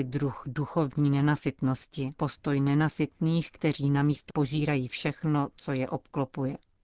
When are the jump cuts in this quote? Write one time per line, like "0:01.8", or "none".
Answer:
0:02.2
0:04.3